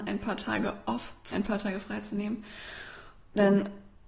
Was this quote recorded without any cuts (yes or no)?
no